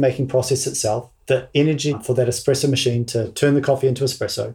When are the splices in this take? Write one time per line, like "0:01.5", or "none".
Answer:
none